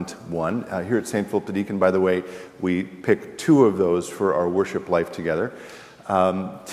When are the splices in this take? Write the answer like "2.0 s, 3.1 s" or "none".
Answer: none